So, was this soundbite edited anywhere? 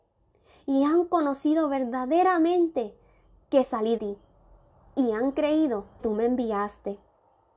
yes; 2 cuts; at 4.0 s, 6.0 s

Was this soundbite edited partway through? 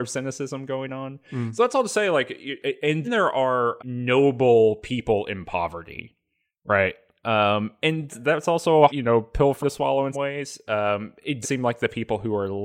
yes; 7 cuts; at 3.0 s, 3.8 s, 8.1 s, 8.9 s, 9.6 s, 10.1 s, 11.4 s

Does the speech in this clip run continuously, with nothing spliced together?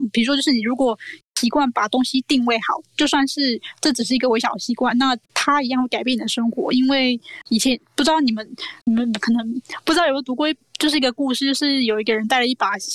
no; 2 cuts; at 5.2 s, 8.8 s

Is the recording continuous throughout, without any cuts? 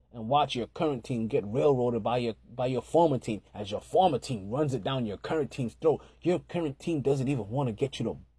no; 1 cut; at 3.5 s

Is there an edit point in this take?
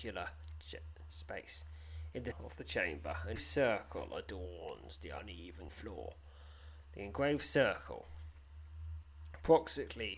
yes; 3 cuts; at 2.3 s, 3.4 s, 5.7 s

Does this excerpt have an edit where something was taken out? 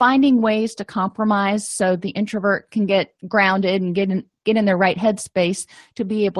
yes; 1 cut; at 3.2 s

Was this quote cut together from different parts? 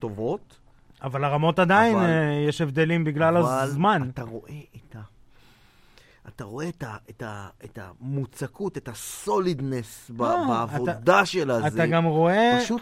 no; 0 cuts

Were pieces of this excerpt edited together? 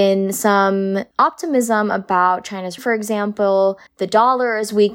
yes; 2 cuts; at 2.8 s, 3.9 s

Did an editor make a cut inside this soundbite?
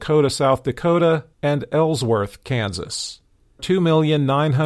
yes; 2 cuts; at 1.3 s, 3.6 s

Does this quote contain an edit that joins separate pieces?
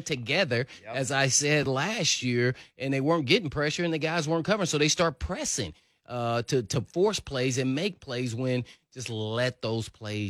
no; 0 cuts

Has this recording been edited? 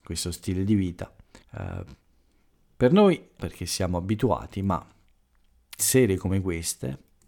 yes; 3 cuts; at 1.4 s, 3.4 s, 5.8 s

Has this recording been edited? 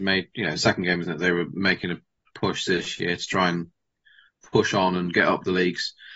yes; 2 cuts; at 1.0 s, 2.3 s

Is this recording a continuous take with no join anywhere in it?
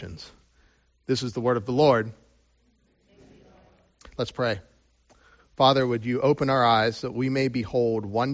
yes; 0 cuts

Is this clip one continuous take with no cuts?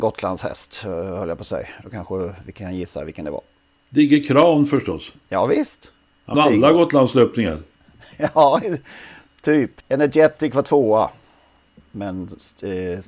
no; 1 cut; at 6.3 s

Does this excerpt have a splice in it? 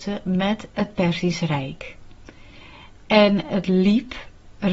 no; 0 cuts

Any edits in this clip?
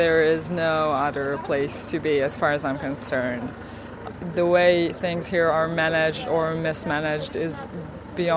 no; 0 cuts

